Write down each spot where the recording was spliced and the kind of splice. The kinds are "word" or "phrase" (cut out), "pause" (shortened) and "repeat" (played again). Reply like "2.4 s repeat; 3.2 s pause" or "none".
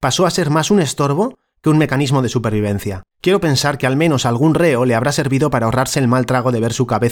3.1 s pause